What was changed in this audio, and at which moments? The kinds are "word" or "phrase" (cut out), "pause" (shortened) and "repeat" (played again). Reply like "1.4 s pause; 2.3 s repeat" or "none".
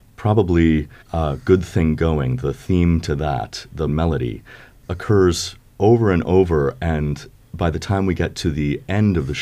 1.0 s pause; 3.9 s word